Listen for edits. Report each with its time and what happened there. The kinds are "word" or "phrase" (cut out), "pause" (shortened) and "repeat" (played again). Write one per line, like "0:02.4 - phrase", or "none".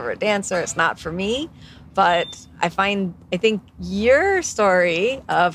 none